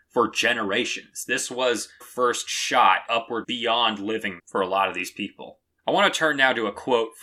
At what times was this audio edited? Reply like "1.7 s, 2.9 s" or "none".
2.0 s, 3.1 s, 3.4 s, 4.4 s